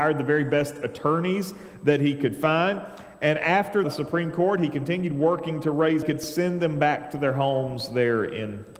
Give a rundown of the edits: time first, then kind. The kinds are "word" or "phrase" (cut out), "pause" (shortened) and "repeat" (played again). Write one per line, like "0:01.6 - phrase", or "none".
0:03.8 - phrase
0:06.0 - phrase